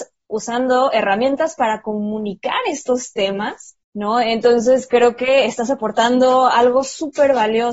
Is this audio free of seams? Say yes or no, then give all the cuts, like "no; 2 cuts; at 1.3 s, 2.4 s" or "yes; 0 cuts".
no; 1 cut; at 3.8 s